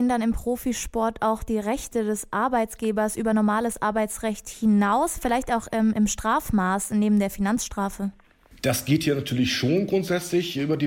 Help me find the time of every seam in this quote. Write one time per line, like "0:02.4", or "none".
none